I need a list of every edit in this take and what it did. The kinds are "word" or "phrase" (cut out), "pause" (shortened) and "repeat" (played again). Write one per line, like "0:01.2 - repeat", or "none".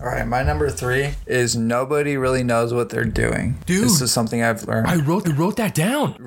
0:05.2 - repeat